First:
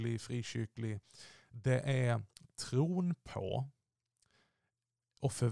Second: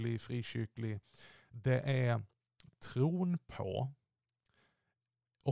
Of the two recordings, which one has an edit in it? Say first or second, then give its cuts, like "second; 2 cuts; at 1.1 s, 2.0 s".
first; 1 cut; at 2.3 s